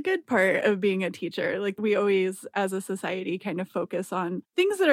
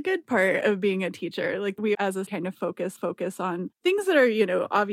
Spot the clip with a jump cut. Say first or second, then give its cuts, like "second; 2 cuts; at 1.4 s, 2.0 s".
second; 3 cuts; at 1.9 s, 2.3 s, 3.0 s